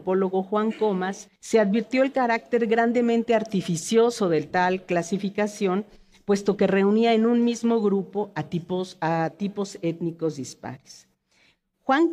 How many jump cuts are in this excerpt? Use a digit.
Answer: 1